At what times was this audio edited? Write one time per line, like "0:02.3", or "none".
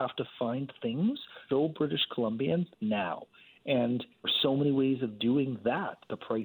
0:01.5
0:02.7
0:04.2